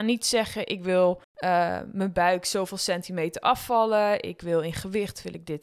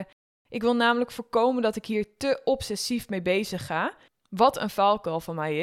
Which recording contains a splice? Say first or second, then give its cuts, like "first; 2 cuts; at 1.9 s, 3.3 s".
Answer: second; 1 cut; at 4.1 s